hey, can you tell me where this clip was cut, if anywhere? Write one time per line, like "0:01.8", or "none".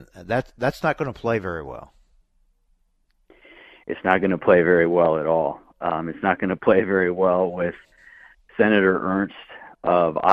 none